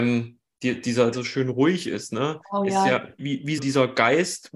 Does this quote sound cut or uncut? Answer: cut